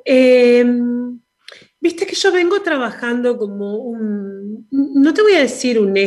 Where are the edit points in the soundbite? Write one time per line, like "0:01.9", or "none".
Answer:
none